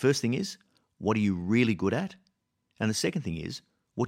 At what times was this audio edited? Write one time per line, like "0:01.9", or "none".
none